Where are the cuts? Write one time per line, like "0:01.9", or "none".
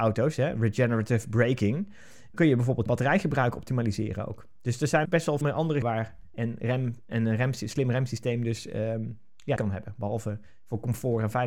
0:02.3
0:02.9
0:05.0
0:05.4
0:05.8
0:06.3
0:07.1
0:09.6